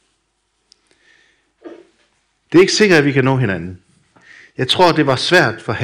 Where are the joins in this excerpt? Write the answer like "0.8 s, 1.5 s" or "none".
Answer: none

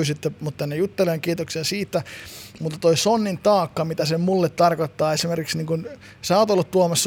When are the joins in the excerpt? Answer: none

